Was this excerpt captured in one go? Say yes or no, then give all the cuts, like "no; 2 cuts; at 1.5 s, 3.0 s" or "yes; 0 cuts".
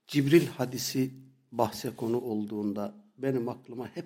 yes; 0 cuts